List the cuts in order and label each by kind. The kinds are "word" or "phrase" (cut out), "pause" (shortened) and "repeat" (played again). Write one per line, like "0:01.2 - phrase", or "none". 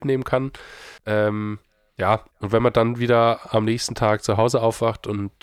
0:01.0 - pause
0:02.3 - pause